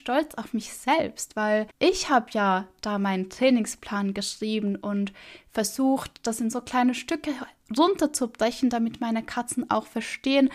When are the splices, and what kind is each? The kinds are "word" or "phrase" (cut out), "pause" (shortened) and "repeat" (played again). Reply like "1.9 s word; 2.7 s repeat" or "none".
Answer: 1.7 s pause